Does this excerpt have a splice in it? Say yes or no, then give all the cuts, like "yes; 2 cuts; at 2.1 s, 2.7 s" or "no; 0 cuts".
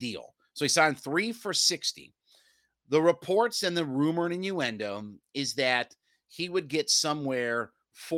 no; 0 cuts